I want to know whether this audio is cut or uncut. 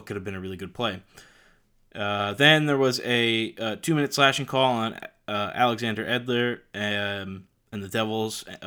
uncut